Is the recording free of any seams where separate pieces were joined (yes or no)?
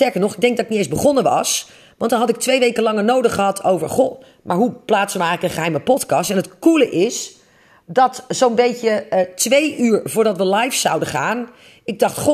yes